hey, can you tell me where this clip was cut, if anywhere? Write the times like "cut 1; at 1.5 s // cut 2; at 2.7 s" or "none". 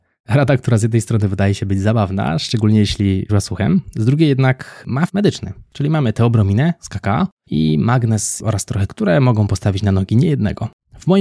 cut 1; at 3.3 s // cut 2; at 5.1 s // cut 3; at 8.9 s